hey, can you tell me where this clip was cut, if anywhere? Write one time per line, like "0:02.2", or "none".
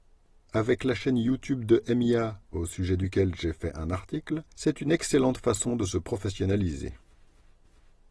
0:02.4
0:04.5